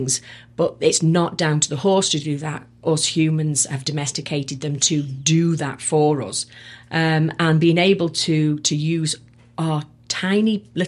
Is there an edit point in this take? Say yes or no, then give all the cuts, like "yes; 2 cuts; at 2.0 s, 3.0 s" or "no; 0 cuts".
no; 0 cuts